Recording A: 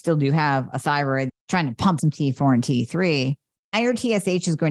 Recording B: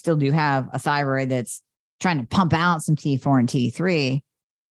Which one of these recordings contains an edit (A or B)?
A